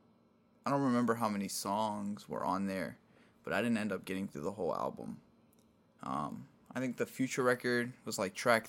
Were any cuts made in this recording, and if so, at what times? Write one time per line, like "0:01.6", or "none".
none